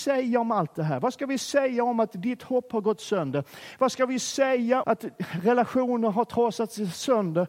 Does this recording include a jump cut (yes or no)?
yes